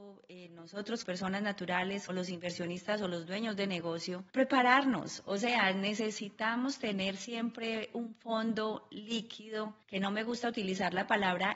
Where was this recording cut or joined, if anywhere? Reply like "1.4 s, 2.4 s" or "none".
1.0 s, 2.1 s, 4.3 s, 9.8 s

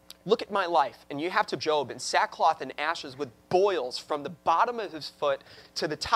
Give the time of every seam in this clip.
1.6 s

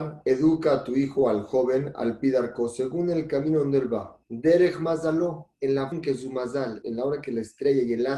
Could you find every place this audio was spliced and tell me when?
4.2 s, 5.9 s, 6.8 s

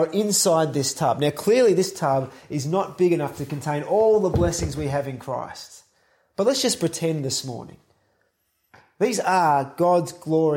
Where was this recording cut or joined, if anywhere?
none

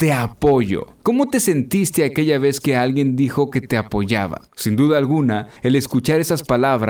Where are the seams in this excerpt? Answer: 4.5 s

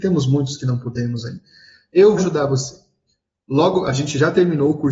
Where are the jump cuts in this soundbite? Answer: 2.2 s

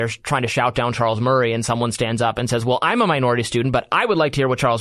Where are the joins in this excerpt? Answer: none

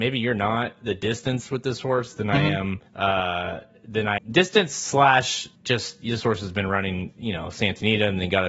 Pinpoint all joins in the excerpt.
2.9 s, 4.2 s, 5.5 s

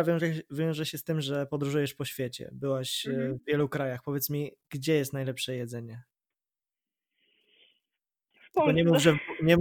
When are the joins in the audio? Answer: none

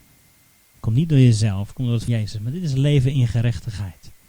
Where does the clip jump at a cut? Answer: 2.1 s

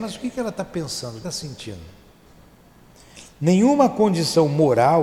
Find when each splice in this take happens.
1.2 s

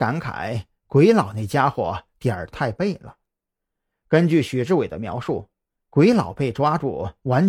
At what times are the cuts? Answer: none

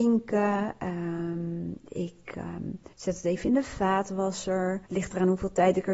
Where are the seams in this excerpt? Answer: 2.9 s, 4.9 s

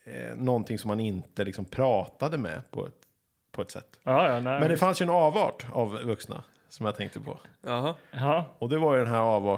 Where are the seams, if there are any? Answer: none

